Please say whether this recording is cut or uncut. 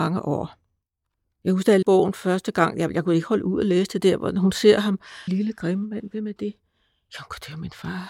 cut